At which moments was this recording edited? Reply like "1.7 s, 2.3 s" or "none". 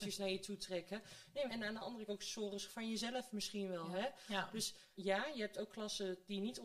1.5 s, 2.1 s, 2.7 s, 5.0 s